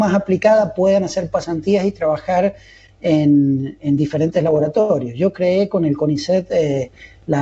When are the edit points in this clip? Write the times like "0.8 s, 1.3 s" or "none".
none